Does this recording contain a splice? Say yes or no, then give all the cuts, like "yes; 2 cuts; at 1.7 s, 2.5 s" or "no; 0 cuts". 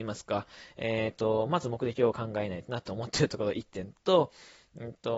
no; 0 cuts